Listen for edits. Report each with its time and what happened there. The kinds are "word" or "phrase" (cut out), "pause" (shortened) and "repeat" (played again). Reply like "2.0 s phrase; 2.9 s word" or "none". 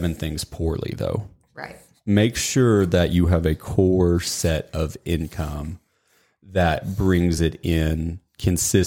none